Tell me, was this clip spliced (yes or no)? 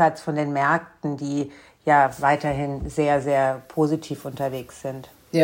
no